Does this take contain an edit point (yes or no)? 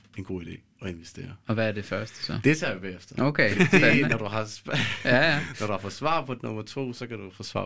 no